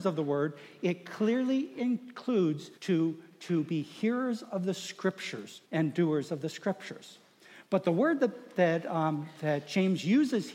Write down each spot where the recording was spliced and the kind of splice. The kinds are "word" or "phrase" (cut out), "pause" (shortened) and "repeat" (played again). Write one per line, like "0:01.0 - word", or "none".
0:02.8 - pause
0:05.6 - pause

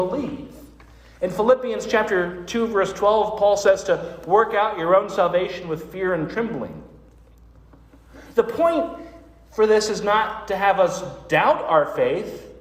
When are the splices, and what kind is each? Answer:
none

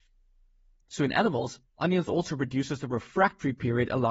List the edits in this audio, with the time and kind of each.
0:01.7 - pause

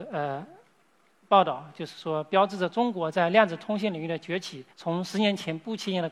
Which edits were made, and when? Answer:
0:04.7 - pause

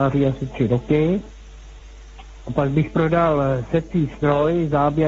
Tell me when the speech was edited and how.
none

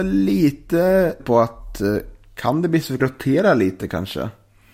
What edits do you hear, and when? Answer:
0:01.2 - word
0:03.0 - word

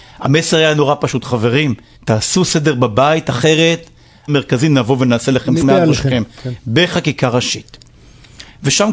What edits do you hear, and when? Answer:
0:01.9 - pause
0:04.3 - phrase
0:05.6 - word

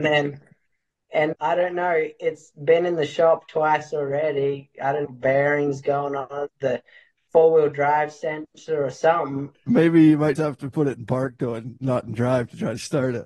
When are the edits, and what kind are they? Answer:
0:01.3 - word
0:05.0 - word
0:06.5 - word
0:10.3 - word

